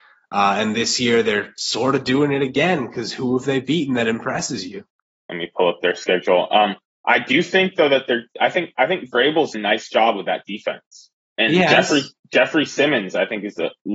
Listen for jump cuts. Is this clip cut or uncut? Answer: cut